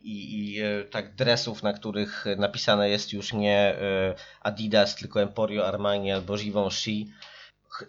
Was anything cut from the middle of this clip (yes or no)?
no